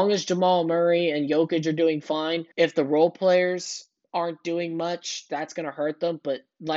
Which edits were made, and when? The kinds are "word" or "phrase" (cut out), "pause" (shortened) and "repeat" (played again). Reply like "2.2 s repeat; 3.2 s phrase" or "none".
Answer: 2.5 s pause